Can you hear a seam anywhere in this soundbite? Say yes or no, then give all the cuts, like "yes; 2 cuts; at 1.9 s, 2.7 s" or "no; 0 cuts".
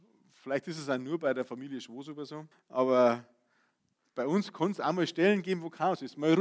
yes; 1 cut; at 2.5 s